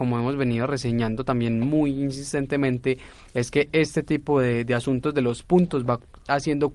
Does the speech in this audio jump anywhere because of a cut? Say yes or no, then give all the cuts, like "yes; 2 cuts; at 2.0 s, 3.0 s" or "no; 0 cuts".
no; 0 cuts